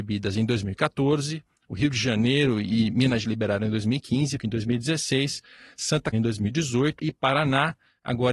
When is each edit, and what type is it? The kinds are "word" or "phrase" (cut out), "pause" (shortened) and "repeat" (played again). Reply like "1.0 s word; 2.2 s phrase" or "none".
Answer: 3.2 s word; 4.4 s word; 6.1 s word; 7.0 s word